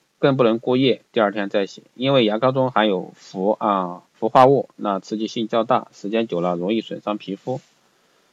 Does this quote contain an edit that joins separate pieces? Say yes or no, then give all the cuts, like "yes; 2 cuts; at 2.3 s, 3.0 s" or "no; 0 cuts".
yes; 1 cut; at 4.1 s